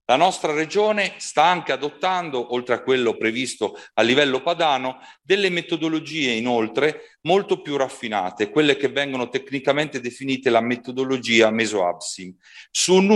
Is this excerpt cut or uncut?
uncut